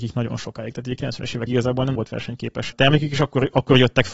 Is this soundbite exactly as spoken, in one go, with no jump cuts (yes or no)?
no